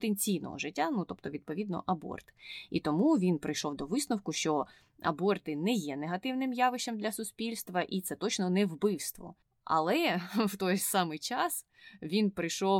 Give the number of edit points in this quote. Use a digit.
0